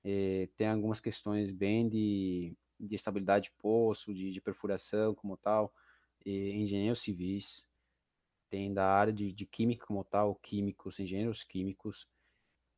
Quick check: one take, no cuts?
yes; 0 cuts

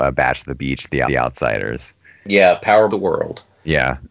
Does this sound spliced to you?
yes; 2 cuts; at 1.0 s, 2.9 s

